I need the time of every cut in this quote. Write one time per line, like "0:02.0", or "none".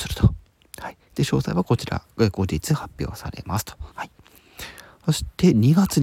0:03.9